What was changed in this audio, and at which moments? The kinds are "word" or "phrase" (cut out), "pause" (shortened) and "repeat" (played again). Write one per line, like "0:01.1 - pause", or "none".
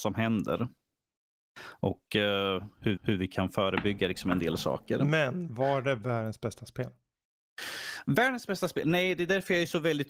0:03.0 - repeat